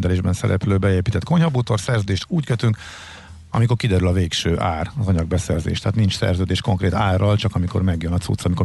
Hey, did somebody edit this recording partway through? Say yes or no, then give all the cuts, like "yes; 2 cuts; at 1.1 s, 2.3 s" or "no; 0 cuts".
no; 0 cuts